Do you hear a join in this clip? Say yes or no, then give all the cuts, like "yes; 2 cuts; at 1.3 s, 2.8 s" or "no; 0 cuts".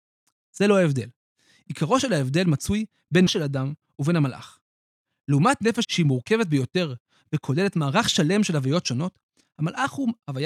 yes; 2 cuts; at 3.3 s, 5.8 s